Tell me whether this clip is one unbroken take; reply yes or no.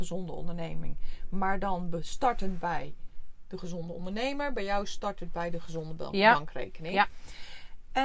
yes